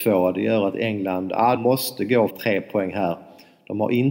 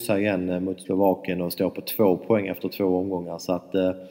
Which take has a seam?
first; 2 cuts; at 1.6 s, 2.3 s

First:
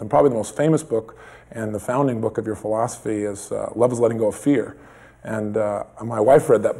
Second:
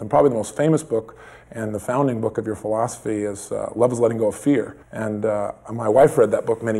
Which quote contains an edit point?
second; 1 cut; at 4.8 s

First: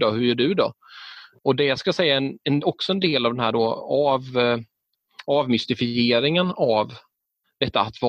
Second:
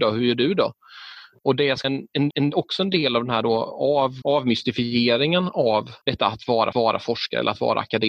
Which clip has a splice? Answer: second; 5 cuts; at 1.8 s, 2.3 s, 4.2 s, 6.0 s, 6.7 s

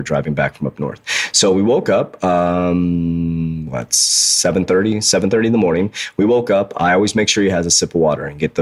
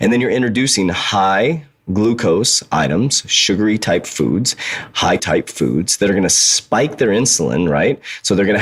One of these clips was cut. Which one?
second; 1 cut; at 5.2 s

